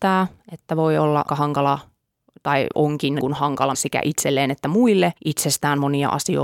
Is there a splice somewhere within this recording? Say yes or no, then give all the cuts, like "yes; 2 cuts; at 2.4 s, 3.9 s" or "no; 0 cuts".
yes; 4 cuts; at 1.3 s, 3.2 s, 3.7 s, 5.2 s